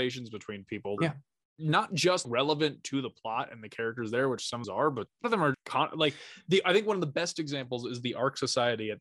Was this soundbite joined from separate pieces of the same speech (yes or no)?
yes